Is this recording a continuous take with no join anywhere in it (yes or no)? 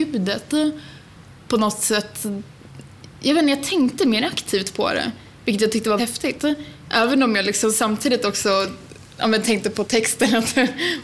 no